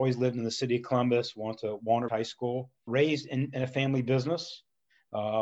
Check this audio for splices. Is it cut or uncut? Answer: cut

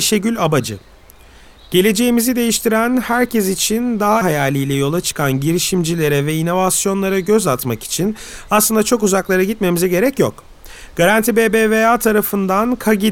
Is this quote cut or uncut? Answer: cut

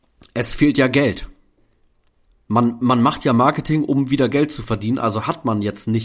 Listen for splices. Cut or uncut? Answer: uncut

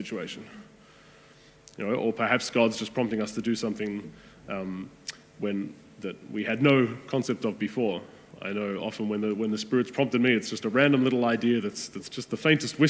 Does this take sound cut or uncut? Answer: uncut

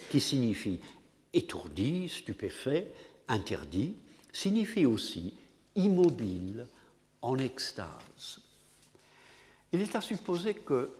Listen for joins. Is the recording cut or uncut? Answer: uncut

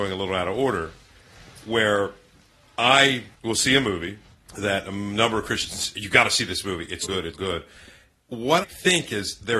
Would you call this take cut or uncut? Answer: cut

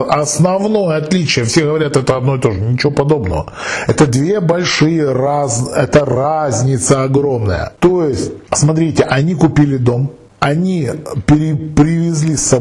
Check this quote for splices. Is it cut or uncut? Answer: uncut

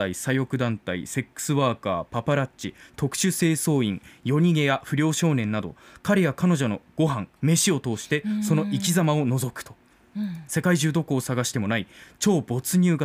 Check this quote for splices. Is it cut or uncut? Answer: uncut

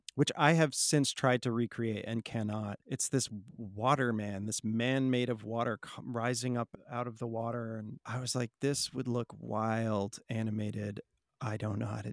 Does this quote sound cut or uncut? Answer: uncut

